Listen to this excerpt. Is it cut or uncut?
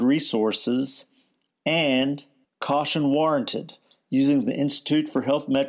uncut